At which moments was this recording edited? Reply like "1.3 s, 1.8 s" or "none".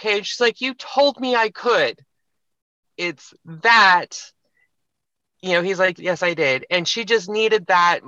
2.8 s, 6.0 s